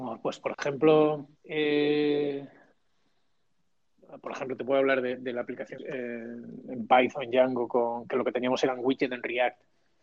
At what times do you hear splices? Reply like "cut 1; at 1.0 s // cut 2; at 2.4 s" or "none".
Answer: cut 1; at 1.4 s // cut 2; at 5.8 s